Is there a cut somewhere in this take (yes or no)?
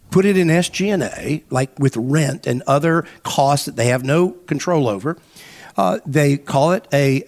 no